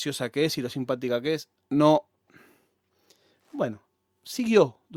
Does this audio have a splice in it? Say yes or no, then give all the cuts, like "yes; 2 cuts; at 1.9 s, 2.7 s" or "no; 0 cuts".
no; 0 cuts